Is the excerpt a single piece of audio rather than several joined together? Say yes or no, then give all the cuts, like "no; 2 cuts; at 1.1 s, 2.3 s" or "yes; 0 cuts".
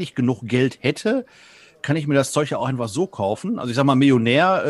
yes; 0 cuts